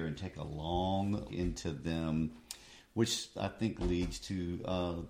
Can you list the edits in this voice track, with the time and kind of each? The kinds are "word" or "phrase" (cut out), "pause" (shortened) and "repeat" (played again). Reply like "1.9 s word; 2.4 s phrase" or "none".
1.3 s word